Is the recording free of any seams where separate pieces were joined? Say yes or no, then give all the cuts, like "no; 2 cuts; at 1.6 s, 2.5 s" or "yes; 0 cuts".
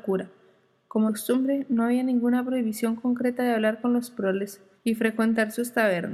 no; 2 cuts; at 1.1 s, 4.8 s